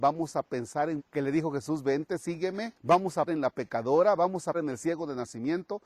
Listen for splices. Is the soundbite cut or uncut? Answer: cut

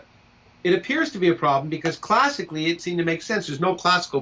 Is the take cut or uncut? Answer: cut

